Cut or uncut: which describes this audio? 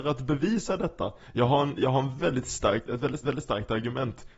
cut